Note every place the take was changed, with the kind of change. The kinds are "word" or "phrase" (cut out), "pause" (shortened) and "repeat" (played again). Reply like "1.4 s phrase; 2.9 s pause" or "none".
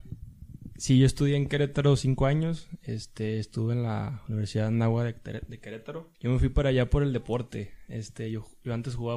6.1 s pause